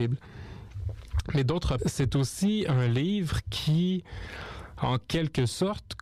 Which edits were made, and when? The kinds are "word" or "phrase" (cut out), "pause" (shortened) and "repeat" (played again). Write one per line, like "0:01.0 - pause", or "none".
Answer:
0:01.8 - word